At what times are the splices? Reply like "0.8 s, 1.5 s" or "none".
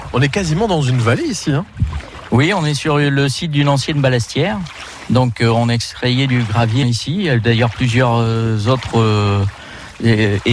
6.8 s